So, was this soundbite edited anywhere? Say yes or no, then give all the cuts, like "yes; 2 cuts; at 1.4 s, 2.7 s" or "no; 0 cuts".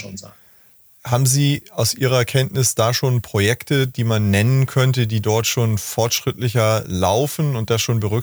no; 0 cuts